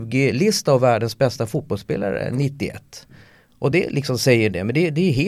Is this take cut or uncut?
uncut